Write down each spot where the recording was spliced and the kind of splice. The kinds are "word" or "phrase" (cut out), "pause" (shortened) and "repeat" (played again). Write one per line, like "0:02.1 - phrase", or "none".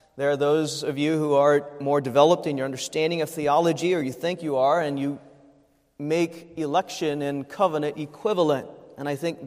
none